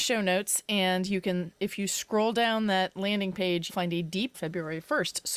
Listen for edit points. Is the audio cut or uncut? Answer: cut